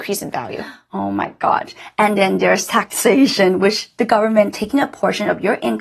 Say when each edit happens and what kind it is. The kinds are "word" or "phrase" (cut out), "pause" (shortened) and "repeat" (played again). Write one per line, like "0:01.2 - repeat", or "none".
none